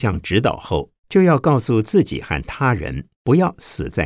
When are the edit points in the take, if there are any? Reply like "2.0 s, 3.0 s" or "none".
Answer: 1.0 s, 3.1 s